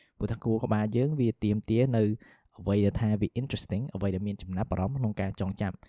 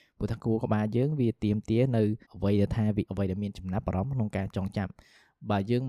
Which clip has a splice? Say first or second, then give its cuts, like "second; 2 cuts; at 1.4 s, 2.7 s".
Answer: second; 2 cuts; at 2.2 s, 3.1 s